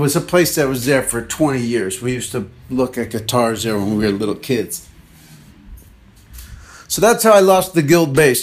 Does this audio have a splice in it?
no; 0 cuts

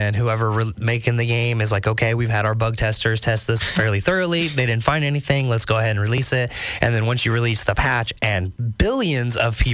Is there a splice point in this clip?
no; 0 cuts

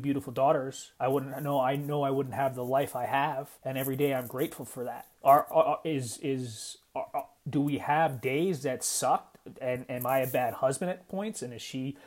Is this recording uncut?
no; 4 cuts; at 0.9 s, 3.6 s, 5.1 s, 7.4 s

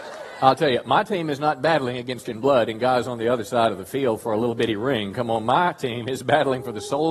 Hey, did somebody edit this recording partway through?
yes; 1 cut; at 2.3 s

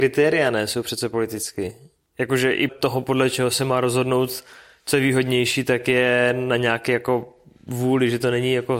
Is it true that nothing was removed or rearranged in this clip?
no; 1 cut; at 2.7 s

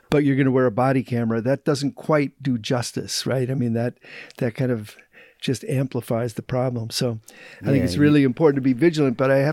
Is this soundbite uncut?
yes; 0 cuts

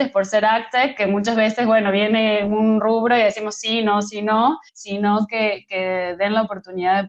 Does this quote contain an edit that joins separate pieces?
yes; 1 cut; at 4.7 s

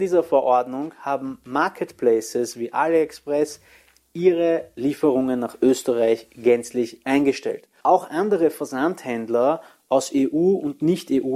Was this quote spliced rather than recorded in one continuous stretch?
no; 0 cuts

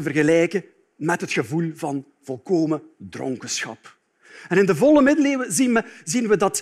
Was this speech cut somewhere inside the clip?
no; 0 cuts

